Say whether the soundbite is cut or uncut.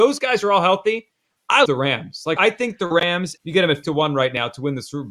cut